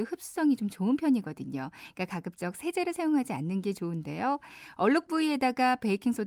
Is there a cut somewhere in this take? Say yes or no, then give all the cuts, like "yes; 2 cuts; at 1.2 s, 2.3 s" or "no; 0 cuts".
no; 0 cuts